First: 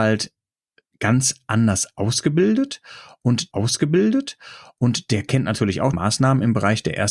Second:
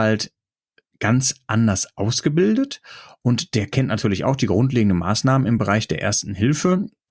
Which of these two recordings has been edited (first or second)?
first